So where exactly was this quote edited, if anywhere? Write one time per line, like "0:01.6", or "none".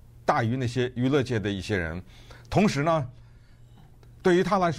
none